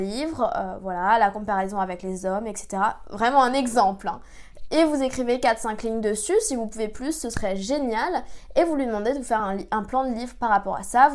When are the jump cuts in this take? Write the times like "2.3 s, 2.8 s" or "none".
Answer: none